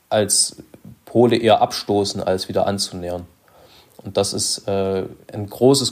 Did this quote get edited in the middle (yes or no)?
no